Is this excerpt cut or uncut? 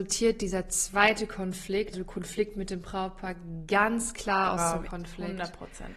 cut